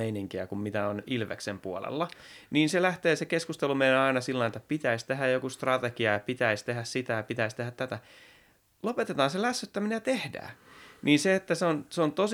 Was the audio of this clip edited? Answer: no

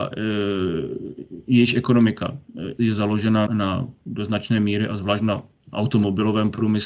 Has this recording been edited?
yes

